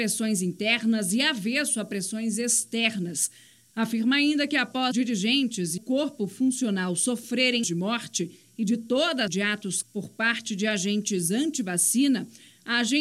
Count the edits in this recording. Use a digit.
5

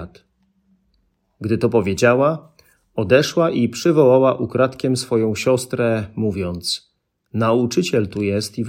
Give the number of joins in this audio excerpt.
0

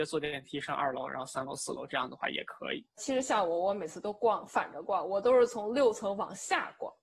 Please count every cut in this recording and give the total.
0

